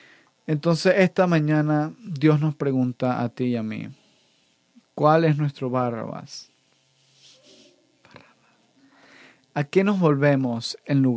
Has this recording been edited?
no; 0 cuts

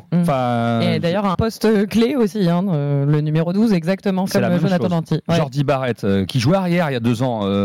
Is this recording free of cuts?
no; 3 cuts; at 1.3 s, 4.3 s, 6.3 s

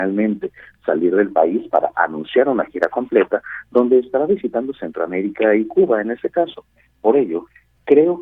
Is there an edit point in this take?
no; 0 cuts

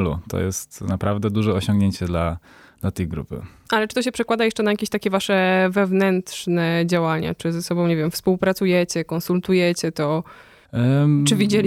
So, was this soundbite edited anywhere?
no; 0 cuts

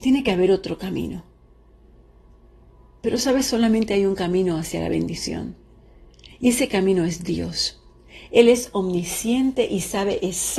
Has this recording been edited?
no; 0 cuts

